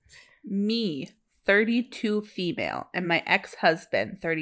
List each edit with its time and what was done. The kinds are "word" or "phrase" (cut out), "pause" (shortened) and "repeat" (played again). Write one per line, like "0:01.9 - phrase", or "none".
none